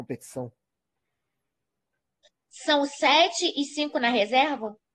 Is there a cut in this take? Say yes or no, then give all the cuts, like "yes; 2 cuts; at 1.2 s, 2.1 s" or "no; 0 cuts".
no; 0 cuts